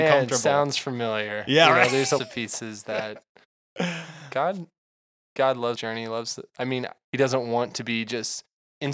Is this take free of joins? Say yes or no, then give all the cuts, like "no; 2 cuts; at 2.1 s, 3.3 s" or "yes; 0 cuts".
no; 3 cuts; at 2.2 s, 5.7 s, 7.0 s